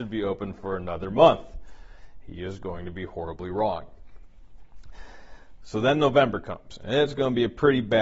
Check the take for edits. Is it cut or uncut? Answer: uncut